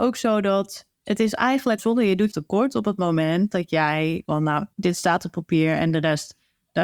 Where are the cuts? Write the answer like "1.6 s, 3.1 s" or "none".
0.9 s, 1.8 s, 2.3 s, 4.3 s, 4.7 s